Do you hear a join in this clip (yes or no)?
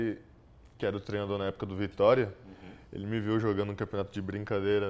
no